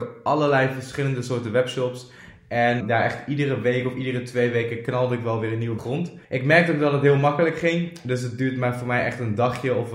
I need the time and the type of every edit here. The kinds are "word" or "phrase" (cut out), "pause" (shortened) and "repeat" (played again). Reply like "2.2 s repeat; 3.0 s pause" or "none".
2.8 s word; 5.8 s phrase; 6.2 s pause